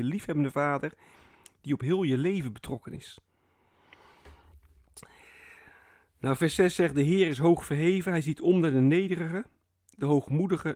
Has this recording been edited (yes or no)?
no